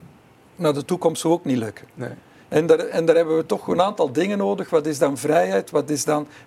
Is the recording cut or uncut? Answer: uncut